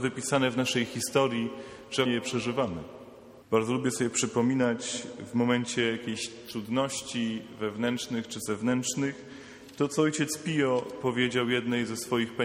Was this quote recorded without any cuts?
no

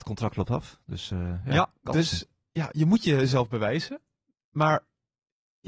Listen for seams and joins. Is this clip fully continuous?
yes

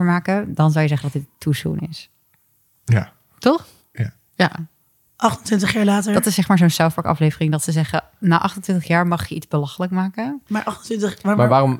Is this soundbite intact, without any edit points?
yes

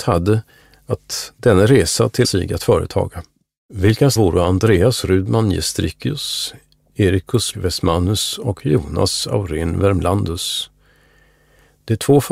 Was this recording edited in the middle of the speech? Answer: yes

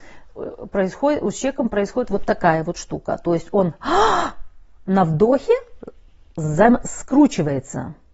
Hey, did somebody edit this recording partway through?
no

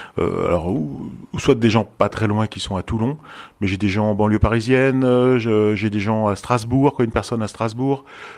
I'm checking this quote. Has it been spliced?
yes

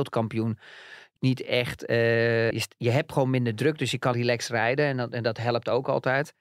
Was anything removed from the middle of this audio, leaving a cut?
yes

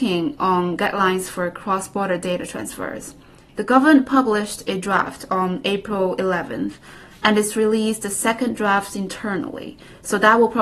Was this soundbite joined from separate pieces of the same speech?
no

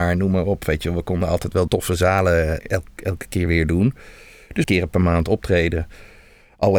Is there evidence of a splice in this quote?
yes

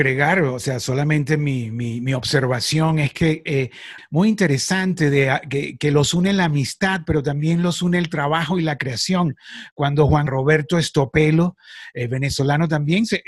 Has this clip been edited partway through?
yes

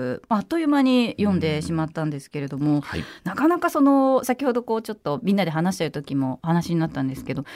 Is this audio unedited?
yes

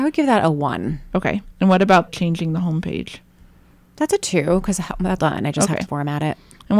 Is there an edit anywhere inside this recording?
yes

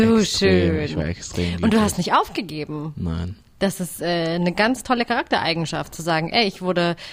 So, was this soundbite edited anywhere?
no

